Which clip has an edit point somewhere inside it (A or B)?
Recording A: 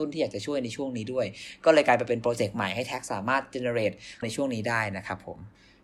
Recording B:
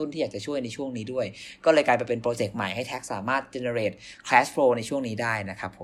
A